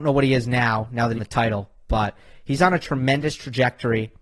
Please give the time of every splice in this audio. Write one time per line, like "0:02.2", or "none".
0:01.2